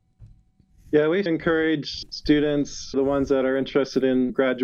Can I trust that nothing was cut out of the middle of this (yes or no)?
no